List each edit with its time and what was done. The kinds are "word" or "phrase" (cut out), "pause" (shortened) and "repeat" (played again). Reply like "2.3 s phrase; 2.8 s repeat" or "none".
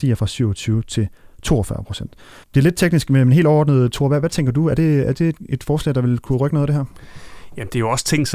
2.4 s pause